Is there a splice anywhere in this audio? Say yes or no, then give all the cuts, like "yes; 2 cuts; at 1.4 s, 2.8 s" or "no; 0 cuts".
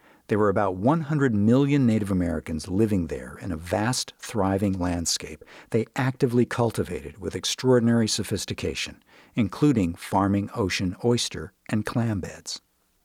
no; 0 cuts